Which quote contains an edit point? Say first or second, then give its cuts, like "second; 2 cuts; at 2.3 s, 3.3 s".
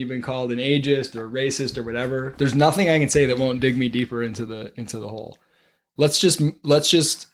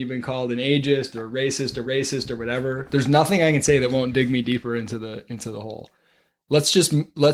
second; 1 cut; at 1.8 s